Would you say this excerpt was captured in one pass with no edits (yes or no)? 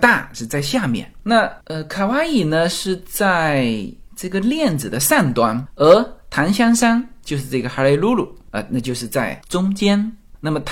no